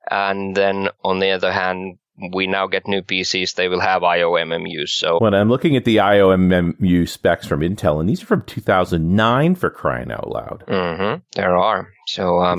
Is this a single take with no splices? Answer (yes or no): no